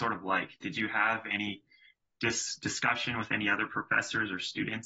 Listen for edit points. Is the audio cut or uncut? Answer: uncut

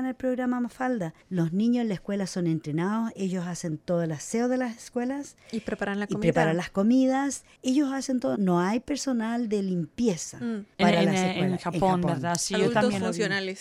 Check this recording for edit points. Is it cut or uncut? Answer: cut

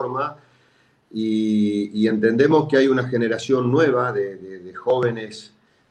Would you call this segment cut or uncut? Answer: uncut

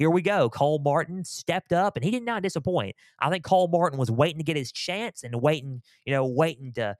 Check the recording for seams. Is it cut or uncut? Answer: uncut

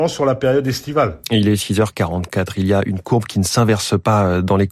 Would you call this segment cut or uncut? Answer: uncut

